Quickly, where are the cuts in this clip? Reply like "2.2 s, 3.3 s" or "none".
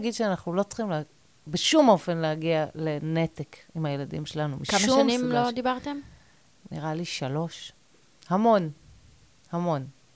none